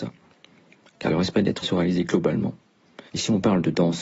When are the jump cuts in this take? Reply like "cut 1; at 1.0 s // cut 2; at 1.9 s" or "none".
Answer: cut 1; at 1.6 s // cut 2; at 3.1 s